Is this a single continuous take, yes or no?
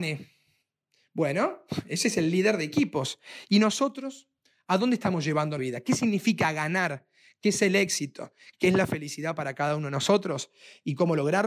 no